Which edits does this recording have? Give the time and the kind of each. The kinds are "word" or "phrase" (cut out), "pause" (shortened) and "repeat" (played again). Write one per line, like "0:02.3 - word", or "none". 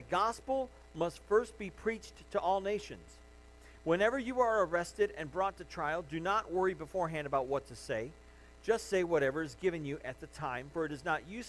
none